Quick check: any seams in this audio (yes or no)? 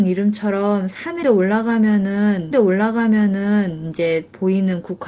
yes